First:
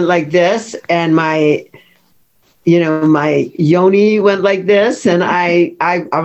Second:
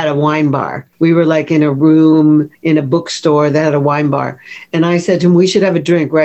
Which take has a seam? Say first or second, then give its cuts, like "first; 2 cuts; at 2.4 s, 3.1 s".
second; 2 cuts; at 0.9 s, 2.5 s